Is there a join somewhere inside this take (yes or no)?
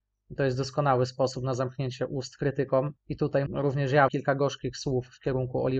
yes